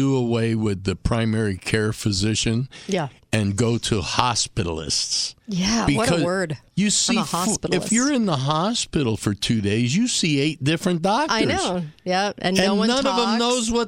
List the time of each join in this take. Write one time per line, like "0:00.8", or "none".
0:05.4